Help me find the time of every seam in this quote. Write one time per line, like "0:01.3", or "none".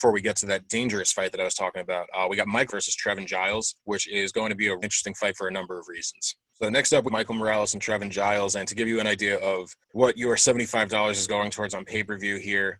0:02.7
0:03.8
0:04.8
0:07.1
0:09.8